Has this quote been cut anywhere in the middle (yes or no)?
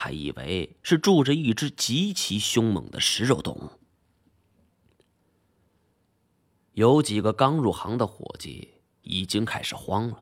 no